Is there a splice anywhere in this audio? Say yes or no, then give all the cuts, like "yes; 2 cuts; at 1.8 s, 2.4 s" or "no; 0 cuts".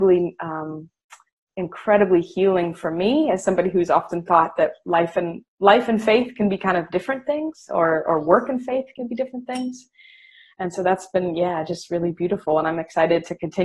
no; 0 cuts